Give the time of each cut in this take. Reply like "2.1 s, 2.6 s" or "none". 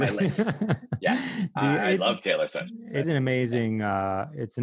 3.0 s

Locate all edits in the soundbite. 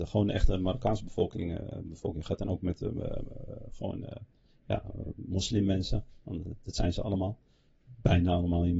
none

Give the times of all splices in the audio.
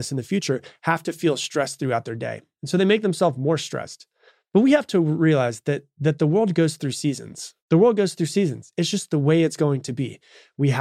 4.3 s, 7.6 s

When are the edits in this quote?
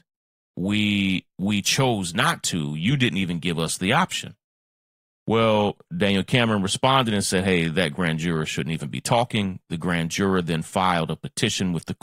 none

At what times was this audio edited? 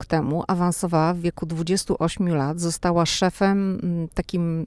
none

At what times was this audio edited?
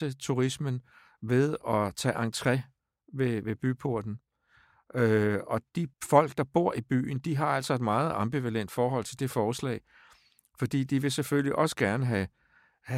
5.9 s

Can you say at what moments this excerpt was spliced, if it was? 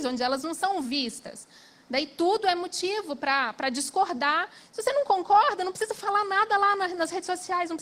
none

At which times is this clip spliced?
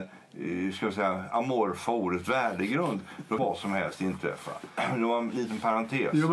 3.4 s

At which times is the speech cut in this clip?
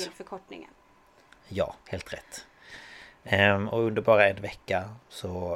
1.8 s

